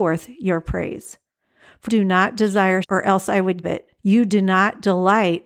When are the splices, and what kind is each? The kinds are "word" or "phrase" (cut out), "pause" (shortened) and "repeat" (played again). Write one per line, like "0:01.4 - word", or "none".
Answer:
0:01.9 - word
0:02.8 - word
0:03.6 - word
0:04.0 - pause